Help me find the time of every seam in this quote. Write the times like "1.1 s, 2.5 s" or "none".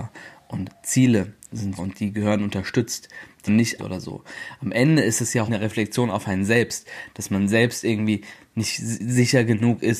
1.8 s, 3.5 s, 3.8 s, 5.5 s